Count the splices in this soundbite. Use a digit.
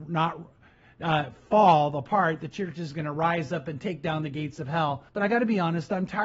1